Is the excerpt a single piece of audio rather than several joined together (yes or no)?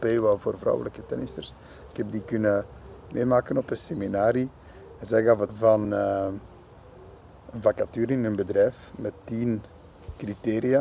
no